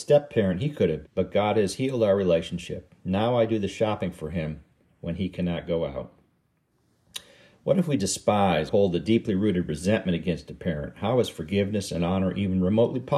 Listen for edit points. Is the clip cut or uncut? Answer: cut